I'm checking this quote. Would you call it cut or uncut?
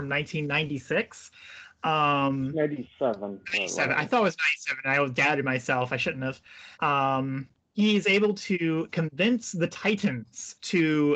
cut